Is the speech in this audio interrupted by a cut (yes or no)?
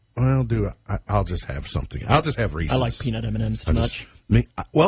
no